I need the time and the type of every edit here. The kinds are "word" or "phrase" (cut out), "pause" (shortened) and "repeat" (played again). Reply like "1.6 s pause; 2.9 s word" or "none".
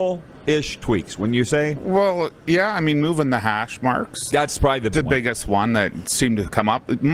4.3 s word; 4.9 s word